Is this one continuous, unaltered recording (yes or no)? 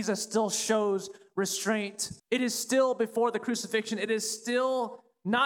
no